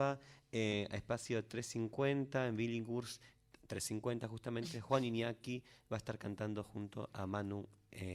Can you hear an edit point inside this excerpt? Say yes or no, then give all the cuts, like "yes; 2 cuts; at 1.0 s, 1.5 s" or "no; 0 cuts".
no; 0 cuts